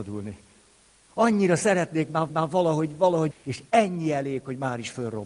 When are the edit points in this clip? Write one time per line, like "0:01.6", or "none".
0:02.3
0:03.3